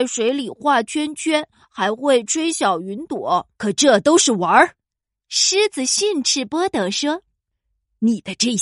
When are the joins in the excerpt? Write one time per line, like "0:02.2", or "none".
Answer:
0:03.5
0:04.8